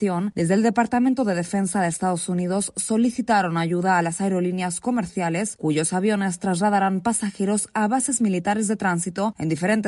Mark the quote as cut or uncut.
uncut